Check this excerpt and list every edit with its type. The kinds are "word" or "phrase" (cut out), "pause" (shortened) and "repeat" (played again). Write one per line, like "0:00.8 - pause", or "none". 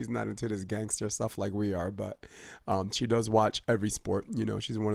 none